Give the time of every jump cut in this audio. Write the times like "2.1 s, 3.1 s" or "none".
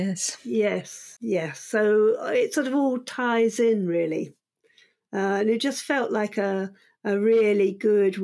none